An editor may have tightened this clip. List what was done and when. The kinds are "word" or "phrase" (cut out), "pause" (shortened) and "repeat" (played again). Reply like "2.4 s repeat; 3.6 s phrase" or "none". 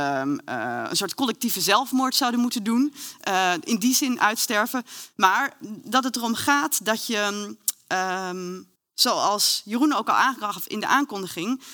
8.8 s pause